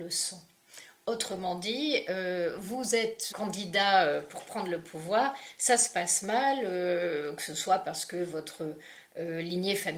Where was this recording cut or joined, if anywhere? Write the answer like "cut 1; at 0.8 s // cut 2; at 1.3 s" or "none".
cut 1; at 3.3 s